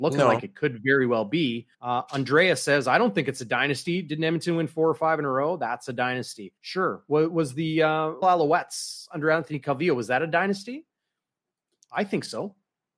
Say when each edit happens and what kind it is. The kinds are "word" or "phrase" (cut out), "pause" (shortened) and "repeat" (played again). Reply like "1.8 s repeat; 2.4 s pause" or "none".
1.7 s pause; 6.6 s pause; 8.2 s phrase